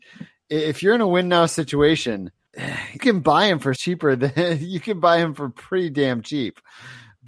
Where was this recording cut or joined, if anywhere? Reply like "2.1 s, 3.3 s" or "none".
3.0 s, 3.8 s